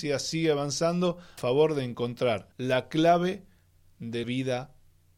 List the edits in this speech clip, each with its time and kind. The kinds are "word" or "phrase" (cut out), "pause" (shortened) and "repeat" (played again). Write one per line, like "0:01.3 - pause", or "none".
0:01.4 - word
0:02.5 - pause
0:04.2 - word